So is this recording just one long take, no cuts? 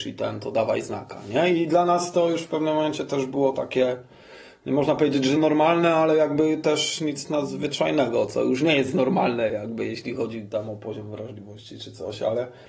yes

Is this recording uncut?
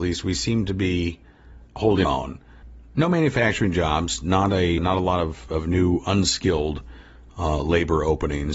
no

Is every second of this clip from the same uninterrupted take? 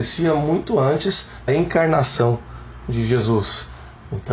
no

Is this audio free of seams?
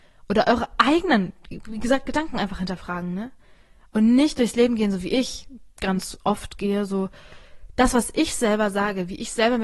yes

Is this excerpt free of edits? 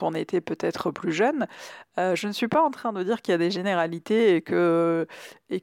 yes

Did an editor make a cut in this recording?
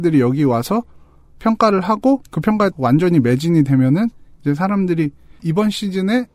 yes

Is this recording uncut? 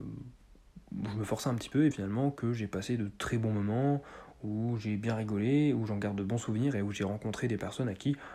no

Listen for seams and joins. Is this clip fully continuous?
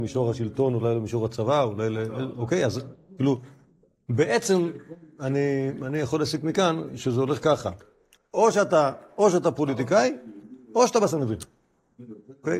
yes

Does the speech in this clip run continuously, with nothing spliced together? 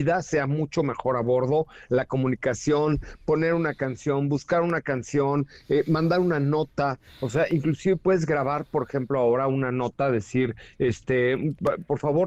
yes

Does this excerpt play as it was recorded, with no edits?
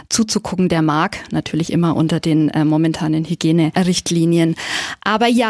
yes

